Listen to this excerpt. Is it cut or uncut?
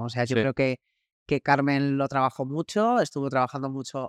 uncut